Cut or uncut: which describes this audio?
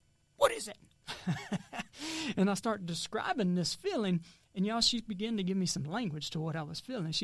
uncut